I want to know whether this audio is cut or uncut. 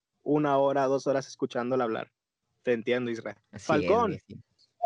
cut